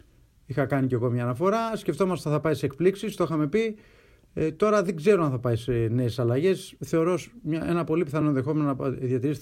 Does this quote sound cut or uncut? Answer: uncut